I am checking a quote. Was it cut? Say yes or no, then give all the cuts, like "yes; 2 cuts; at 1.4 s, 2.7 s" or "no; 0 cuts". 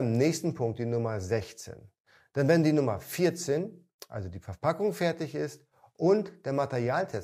no; 0 cuts